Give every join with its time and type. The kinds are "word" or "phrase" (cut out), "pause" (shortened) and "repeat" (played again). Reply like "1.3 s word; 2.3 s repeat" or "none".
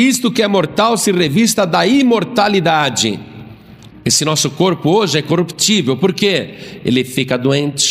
none

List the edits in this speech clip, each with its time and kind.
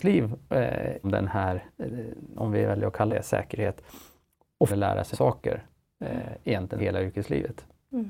1.0 s word; 2.4 s word; 3.1 s word; 4.7 s word; 5.1 s word; 6.8 s word

